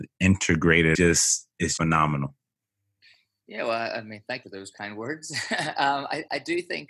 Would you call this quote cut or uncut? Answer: cut